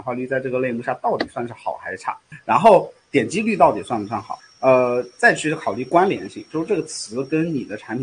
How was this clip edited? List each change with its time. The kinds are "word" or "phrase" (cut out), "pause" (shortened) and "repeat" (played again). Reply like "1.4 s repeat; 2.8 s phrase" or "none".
none